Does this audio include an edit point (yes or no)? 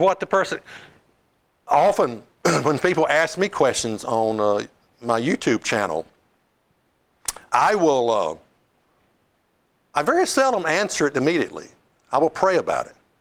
no